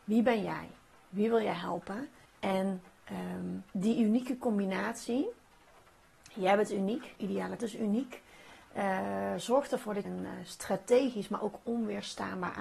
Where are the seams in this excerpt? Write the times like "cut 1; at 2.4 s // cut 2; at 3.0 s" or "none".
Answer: cut 1; at 2.2 s // cut 2; at 3.7 s // cut 3; at 7.2 s // cut 4; at 7.6 s // cut 5; at 10.0 s

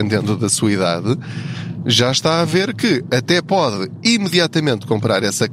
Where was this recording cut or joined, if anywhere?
none

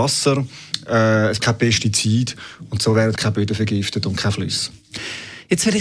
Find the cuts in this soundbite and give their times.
cut 1; at 1.4 s // cut 2; at 3.2 s

